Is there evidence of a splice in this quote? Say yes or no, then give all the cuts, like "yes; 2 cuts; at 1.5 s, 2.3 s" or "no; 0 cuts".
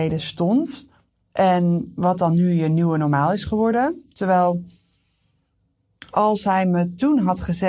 no; 0 cuts